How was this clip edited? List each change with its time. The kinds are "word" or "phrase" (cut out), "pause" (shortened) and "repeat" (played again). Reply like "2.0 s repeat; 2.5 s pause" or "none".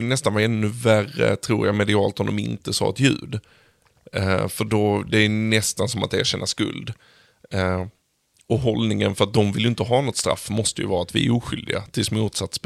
none